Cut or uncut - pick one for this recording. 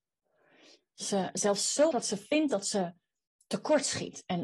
cut